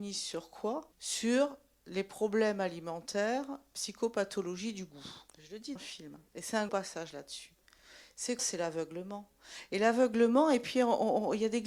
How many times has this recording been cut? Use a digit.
6